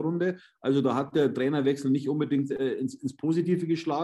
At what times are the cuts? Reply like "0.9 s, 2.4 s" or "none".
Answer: none